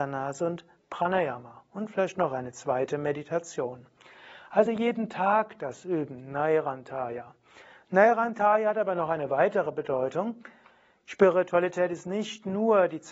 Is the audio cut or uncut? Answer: uncut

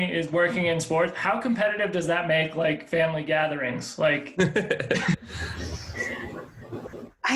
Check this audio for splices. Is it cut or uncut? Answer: uncut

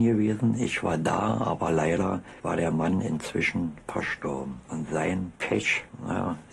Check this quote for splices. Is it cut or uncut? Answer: uncut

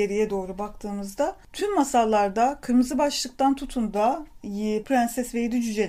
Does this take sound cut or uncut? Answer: cut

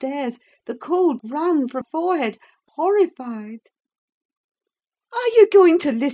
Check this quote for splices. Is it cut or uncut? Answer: cut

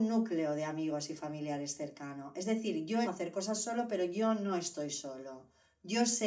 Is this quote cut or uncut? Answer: cut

